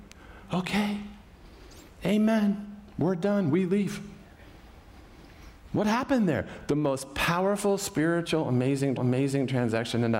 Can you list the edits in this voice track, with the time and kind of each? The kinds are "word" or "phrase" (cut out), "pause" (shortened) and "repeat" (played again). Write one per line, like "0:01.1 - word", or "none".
0:09.0 - repeat